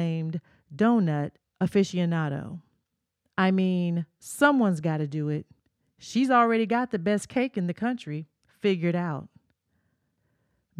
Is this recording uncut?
yes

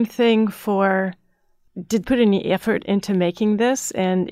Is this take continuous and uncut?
no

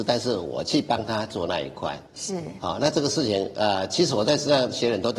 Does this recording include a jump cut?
yes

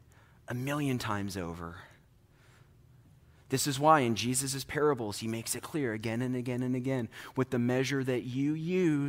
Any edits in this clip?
no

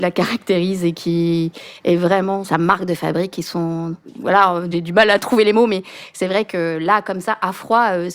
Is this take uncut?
yes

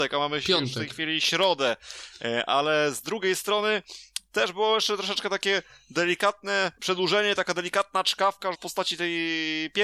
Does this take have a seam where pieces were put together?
yes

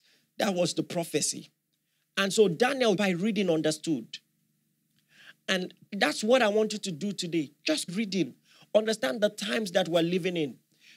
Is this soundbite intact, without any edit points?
no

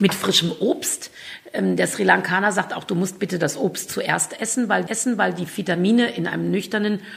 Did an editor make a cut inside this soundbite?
yes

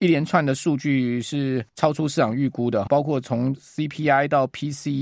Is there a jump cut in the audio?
yes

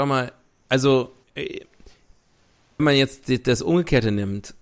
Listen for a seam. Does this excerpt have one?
yes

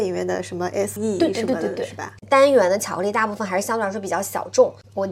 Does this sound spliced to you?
yes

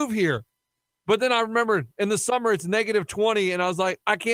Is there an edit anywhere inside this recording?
no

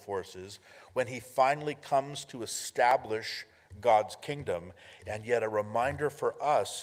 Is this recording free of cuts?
yes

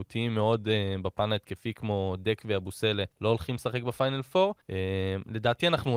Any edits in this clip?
yes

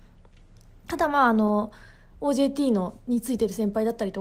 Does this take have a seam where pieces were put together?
no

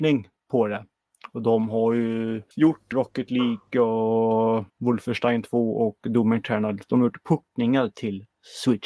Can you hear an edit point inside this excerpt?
yes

